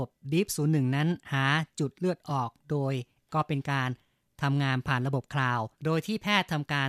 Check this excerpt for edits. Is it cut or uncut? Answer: cut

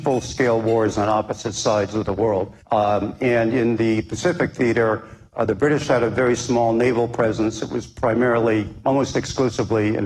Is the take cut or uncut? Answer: cut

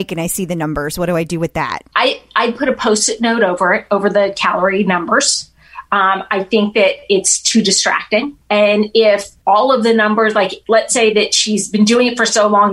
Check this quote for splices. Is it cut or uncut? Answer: cut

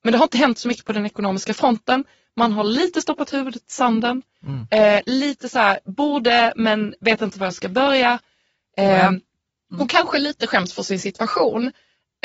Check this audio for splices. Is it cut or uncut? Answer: uncut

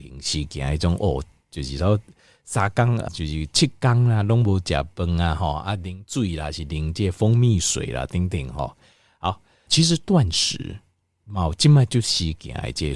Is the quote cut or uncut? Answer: cut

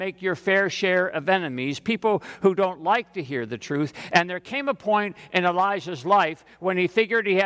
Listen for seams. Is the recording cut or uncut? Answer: uncut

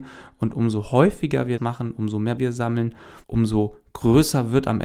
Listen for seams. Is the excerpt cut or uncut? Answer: cut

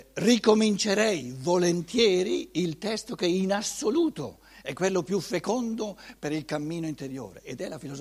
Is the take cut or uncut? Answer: uncut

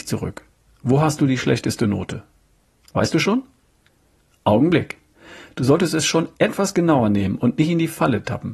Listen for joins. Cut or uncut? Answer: uncut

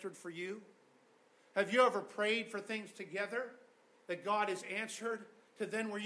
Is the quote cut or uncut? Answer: uncut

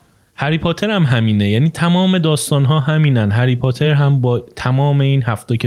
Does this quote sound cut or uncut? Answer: uncut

